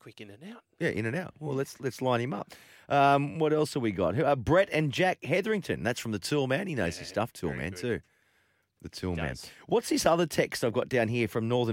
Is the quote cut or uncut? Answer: uncut